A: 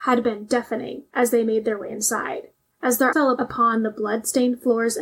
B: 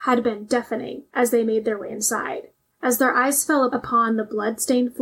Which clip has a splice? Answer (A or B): A